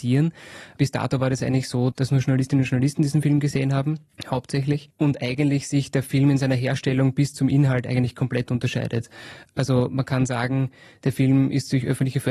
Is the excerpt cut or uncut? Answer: uncut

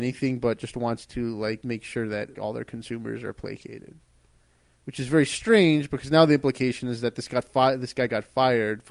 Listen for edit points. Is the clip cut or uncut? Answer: cut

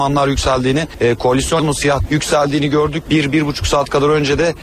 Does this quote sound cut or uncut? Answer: cut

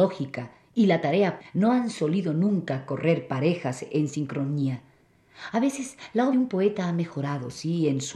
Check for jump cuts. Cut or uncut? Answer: cut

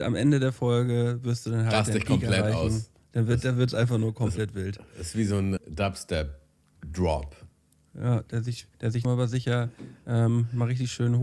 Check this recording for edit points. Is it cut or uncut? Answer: cut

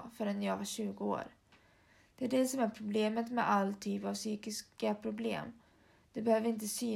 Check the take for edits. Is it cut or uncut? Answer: uncut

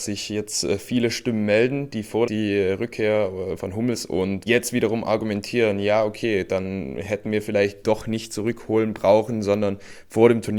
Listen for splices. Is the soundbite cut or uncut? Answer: cut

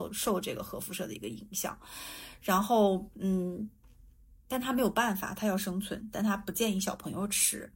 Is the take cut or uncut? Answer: uncut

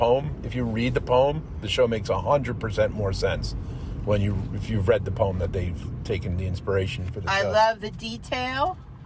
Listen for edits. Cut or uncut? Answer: uncut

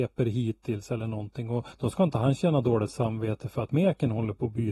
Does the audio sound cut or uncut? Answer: cut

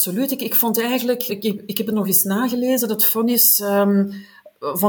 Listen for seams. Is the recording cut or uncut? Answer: cut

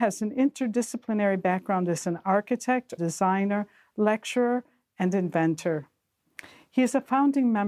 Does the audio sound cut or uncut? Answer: cut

